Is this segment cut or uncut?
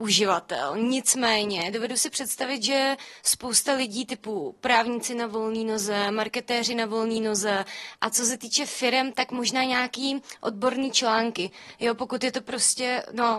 uncut